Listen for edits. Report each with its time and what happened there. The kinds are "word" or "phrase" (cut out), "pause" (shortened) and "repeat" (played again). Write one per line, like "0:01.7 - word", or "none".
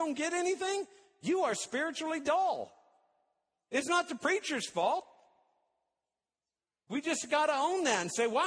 none